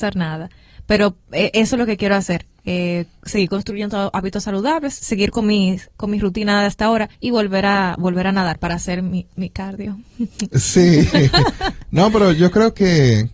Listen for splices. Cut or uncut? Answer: cut